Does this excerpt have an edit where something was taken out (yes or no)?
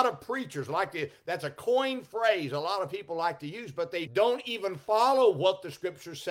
yes